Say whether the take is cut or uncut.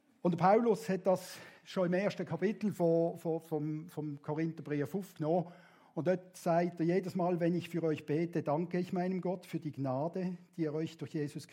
uncut